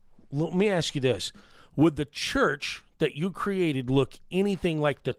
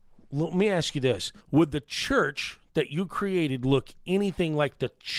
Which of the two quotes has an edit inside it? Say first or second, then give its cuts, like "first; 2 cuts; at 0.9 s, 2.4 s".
second; 1 cut; at 1.4 s